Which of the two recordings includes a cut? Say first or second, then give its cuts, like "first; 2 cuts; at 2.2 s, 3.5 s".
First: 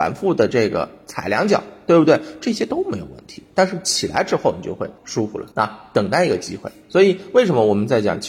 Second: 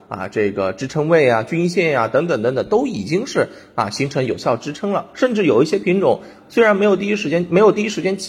first; 2 cuts; at 5.0 s, 5.5 s